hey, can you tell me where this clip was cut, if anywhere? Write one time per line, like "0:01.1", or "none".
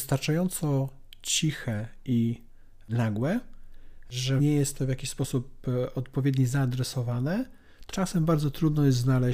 0:04.4
0:07.9